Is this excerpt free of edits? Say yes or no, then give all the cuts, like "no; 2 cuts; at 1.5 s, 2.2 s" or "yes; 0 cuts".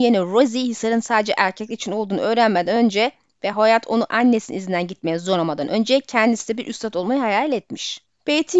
yes; 0 cuts